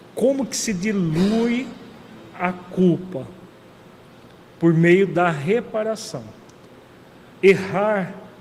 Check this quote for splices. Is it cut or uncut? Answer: uncut